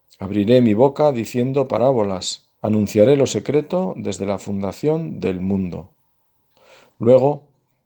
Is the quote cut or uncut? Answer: cut